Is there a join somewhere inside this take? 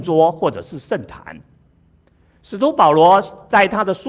no; 0 cuts

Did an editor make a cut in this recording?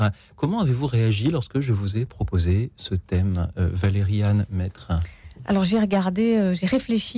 no; 0 cuts

